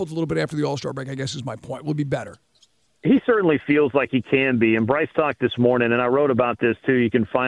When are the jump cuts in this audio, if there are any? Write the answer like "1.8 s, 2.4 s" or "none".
none